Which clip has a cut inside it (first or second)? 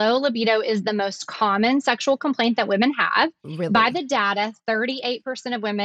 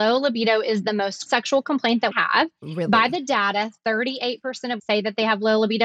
second